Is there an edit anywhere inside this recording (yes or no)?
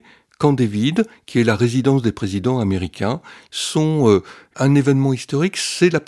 no